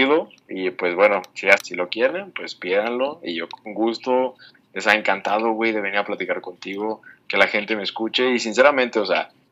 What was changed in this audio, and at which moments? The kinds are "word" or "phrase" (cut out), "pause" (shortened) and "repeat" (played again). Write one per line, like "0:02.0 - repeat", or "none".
0:01.6 - word